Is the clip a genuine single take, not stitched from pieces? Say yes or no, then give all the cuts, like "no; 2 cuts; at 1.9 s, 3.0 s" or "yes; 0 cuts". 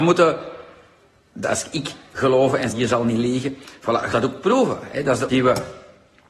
no; 4 cuts; at 1.4 s, 2.7 s, 4.1 s, 5.3 s